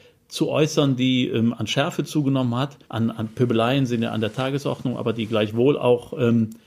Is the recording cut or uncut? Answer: cut